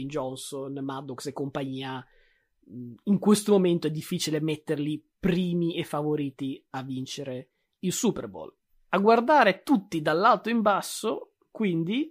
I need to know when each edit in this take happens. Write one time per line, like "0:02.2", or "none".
none